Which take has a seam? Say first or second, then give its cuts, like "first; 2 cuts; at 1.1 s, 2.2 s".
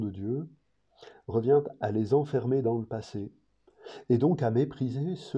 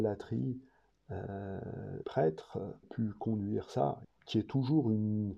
second; 3 cuts; at 2.0 s, 2.8 s, 4.0 s